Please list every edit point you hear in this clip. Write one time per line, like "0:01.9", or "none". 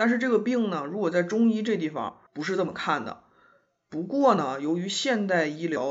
0:02.3